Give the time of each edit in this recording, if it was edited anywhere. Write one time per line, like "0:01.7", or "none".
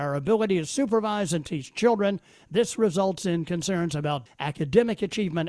0:04.3